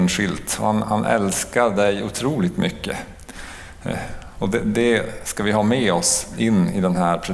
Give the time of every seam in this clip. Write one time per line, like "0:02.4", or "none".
none